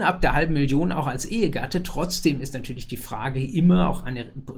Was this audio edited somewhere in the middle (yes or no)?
no